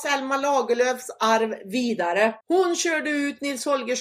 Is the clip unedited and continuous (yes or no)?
no